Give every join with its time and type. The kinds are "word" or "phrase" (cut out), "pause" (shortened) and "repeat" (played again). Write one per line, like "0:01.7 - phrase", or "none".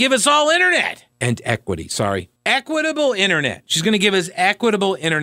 0:01.1 - pause
0:02.4 - pause

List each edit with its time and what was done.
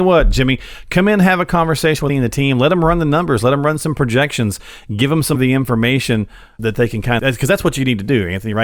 0:02.1 - word
0:05.3 - word
0:07.2 - word

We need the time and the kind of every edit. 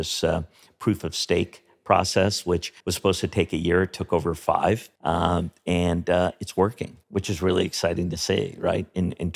0:02.8 - pause
0:05.0 - pause
0:07.0 - pause

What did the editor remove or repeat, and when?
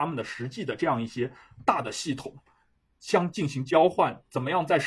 none

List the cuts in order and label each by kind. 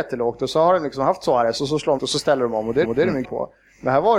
0:02.0 - word
0:02.8 - repeat
0:03.2 - word

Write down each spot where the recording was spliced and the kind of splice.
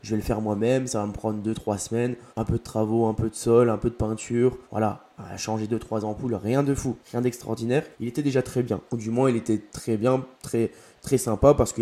0:02.3 - pause
0:04.6 - pause
0:07.0 - pause
0:07.9 - pause
0:08.9 - pause
0:10.3 - pause

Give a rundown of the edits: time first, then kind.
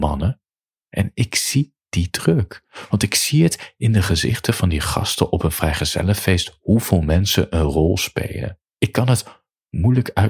0:08.6 - pause

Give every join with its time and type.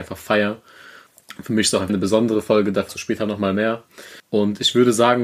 0:01.9 - word
0:04.2 - pause

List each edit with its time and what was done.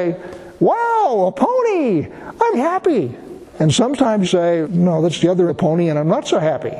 0:02.5 - word
0:03.5 - pause
0:04.2 - phrase
0:04.6 - word
0:05.5 - phrase

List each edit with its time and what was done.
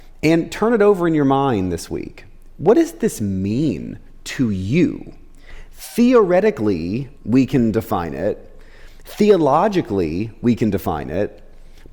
0:07.2 - pause

